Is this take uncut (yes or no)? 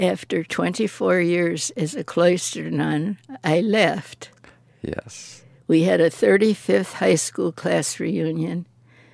yes